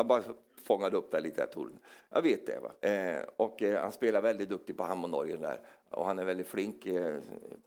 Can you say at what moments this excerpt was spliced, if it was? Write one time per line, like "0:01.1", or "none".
0:02.8

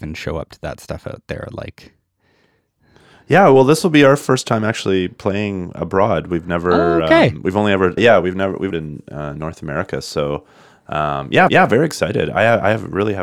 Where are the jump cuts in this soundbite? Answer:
0:08.0
0:08.7
0:11.5

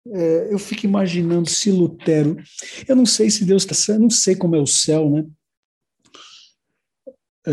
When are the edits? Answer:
0:03.7

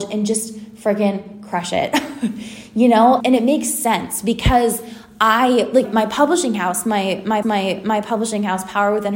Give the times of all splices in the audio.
0:03.2
0:05.8
0:07.4

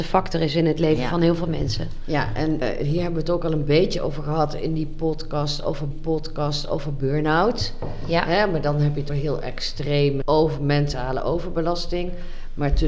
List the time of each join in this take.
0:02.6
0:05.9
0:09.1
0:10.2

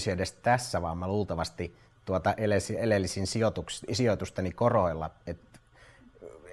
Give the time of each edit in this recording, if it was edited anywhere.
none

